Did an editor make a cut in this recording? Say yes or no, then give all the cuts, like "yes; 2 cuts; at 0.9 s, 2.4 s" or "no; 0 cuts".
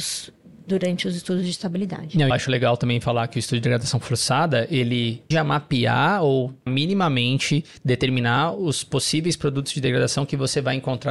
yes; 3 cuts; at 2.3 s, 5.3 s, 6.7 s